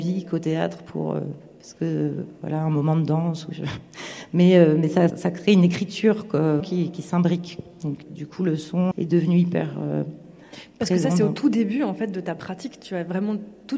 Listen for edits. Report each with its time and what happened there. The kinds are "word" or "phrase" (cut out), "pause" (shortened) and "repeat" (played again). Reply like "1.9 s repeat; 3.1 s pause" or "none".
5.1 s word; 6.6 s word; 8.0 s word; 8.9 s word